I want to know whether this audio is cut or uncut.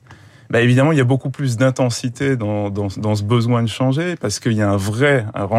uncut